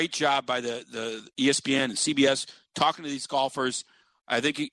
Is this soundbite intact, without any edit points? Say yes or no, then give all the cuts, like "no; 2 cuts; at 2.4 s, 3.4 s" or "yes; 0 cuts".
yes; 0 cuts